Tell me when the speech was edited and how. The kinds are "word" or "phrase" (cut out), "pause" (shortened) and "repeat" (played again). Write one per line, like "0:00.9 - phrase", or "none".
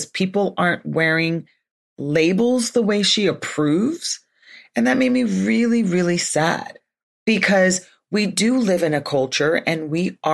none